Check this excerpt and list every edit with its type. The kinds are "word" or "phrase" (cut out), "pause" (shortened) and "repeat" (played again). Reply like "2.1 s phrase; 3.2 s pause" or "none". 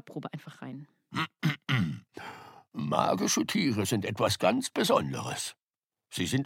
none